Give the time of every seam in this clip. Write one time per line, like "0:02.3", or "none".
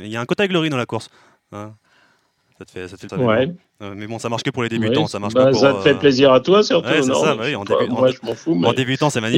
0:03.1